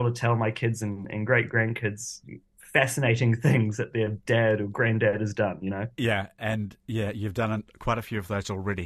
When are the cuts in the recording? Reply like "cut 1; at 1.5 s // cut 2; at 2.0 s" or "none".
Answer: none